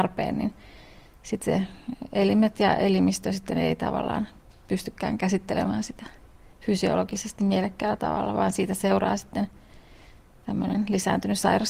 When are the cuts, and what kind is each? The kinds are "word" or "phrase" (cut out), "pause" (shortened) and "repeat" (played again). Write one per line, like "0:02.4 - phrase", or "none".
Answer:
none